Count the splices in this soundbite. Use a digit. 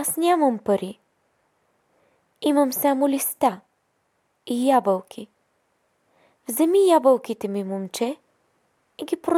0